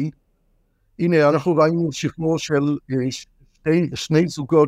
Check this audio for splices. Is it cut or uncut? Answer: uncut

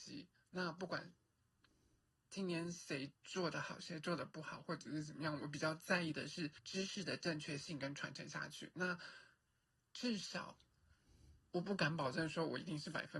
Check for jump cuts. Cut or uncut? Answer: cut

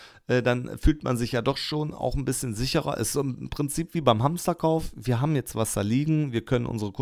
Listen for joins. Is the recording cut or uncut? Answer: uncut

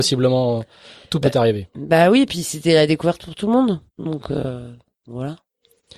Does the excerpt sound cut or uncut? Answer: cut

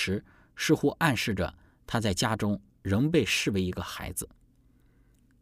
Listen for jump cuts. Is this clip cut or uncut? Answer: uncut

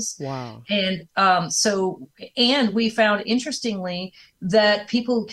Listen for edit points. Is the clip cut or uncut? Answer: uncut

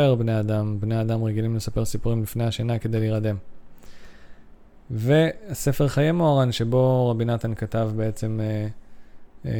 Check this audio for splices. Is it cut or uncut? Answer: uncut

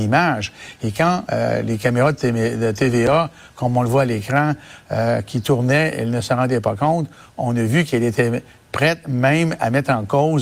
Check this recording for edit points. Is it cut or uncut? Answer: uncut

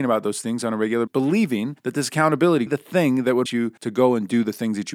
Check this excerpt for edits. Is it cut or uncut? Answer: cut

